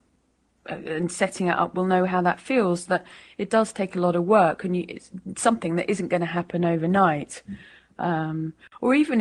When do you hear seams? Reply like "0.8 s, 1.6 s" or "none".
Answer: none